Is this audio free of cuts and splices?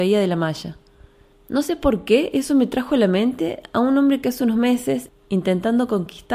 yes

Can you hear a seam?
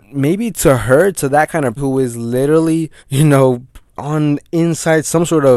yes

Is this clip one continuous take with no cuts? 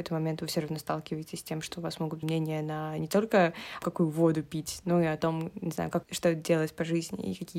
no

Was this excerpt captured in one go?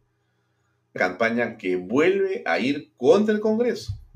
no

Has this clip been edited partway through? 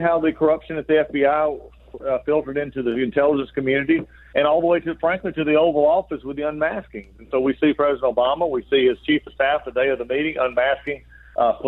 no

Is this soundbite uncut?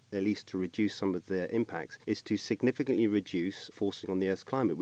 no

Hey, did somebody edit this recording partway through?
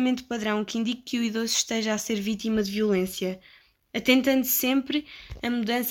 no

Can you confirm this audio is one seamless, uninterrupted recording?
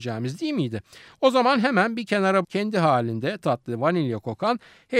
no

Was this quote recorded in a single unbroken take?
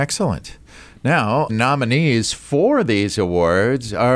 no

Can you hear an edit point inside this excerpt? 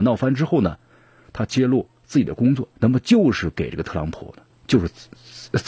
yes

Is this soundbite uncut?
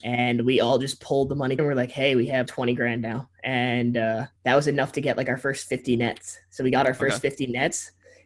no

